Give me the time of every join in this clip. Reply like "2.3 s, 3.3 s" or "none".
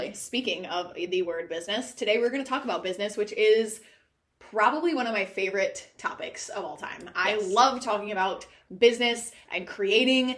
none